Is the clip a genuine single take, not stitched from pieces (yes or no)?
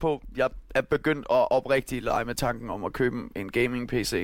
yes